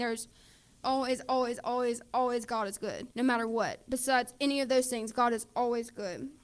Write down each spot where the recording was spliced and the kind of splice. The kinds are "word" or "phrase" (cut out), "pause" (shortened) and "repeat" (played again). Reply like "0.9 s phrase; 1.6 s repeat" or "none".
3.1 s pause